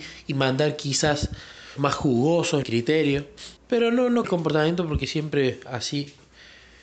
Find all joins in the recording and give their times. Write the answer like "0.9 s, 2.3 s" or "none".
1.8 s, 2.6 s, 3.6 s, 4.2 s